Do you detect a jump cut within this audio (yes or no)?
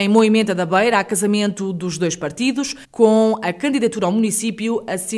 yes